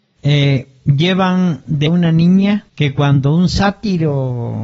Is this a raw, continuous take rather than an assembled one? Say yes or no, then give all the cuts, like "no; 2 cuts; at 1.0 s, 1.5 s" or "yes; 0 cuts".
no; 2 cuts; at 1.9 s, 2.7 s